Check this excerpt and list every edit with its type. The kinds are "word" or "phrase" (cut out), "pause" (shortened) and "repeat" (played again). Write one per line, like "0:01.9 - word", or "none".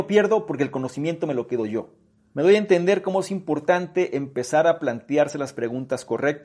0:02.2 - pause